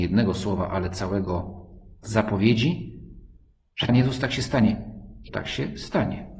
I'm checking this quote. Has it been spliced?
yes; 3 cuts; at 2.0 s, 3.9 s, 5.3 s

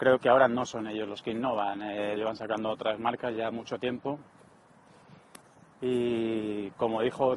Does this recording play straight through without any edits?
no; 1 cut; at 2.2 s

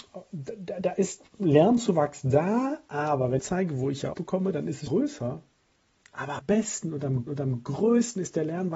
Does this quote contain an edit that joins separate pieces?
yes; 5 cuts; at 3.4 s, 4.1 s, 4.9 s, 6.4 s, 7.3 s

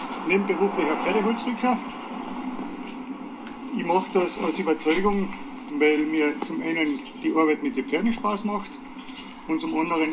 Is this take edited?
no; 0 cuts

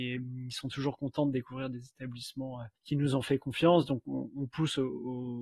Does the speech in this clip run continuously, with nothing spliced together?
no; 1 cut; at 2.8 s

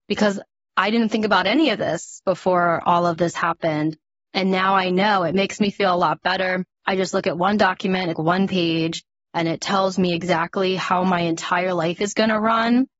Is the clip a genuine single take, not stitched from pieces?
no; 1 cut; at 8.1 s

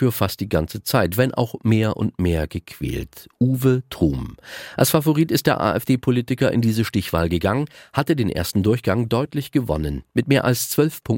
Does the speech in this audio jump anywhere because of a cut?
no; 0 cuts

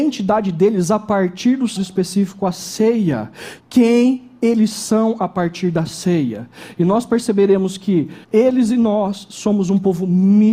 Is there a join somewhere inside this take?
yes; 3 cuts; at 1.8 s, 3.6 s, 8.2 s

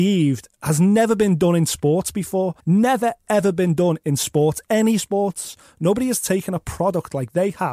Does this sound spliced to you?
yes; 1 cut; at 2.6 s

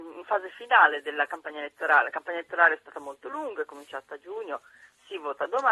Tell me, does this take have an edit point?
no; 0 cuts

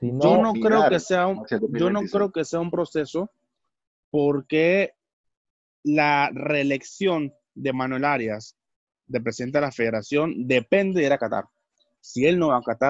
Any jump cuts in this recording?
no; 0 cuts

